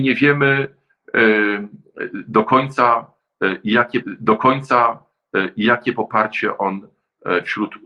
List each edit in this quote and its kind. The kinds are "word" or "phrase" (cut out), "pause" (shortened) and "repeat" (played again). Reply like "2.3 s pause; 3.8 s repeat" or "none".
4.0 s repeat

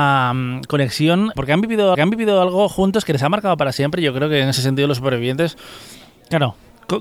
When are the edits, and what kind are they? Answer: 1.4 s word; 1.9 s repeat

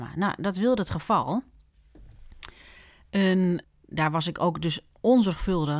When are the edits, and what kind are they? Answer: 3.6 s phrase

